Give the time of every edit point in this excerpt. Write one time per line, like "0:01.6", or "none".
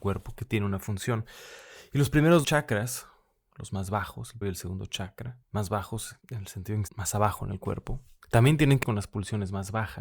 0:02.4
0:04.4
0:05.4
0:06.2
0:06.9
0:08.2
0:08.8